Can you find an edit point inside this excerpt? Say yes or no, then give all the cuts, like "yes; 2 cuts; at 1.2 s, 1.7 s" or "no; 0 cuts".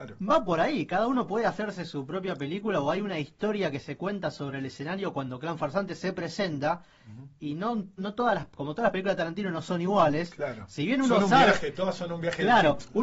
yes; 1 cut; at 8.0 s